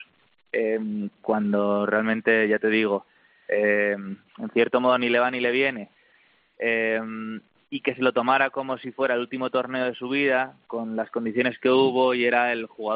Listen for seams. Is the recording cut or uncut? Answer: uncut